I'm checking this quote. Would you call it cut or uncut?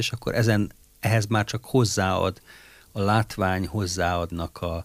uncut